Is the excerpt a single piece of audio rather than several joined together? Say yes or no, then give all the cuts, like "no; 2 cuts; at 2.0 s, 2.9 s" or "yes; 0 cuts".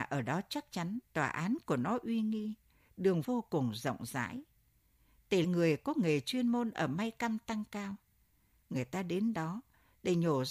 no; 3 cuts; at 1.1 s, 3.2 s, 5.4 s